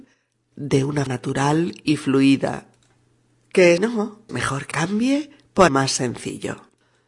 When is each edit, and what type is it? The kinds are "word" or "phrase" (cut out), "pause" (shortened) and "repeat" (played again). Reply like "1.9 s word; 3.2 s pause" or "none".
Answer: 1.1 s word; 3.8 s word; 4.3 s word; 4.7 s word; 5.7 s word

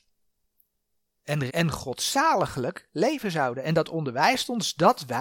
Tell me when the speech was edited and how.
1.2 s word; 1.5 s word

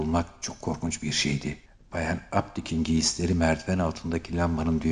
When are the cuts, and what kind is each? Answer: 1.7 s pause

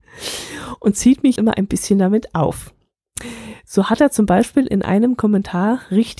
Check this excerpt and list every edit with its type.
1.4 s word

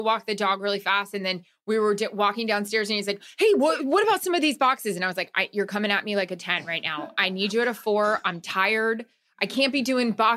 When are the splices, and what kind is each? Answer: none

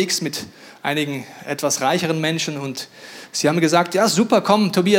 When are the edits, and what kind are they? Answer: none

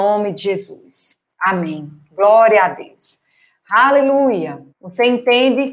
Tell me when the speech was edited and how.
4.7 s pause

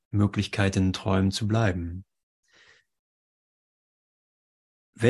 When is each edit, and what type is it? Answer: none

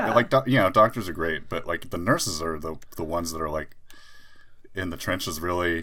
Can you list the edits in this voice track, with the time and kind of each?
none

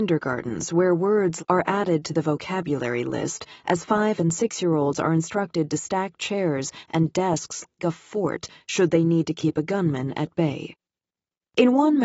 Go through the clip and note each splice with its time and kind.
1.4 s phrase; 7.8 s word

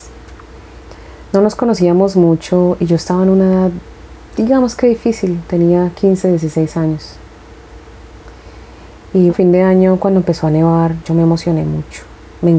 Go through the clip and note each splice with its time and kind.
9.3 s word

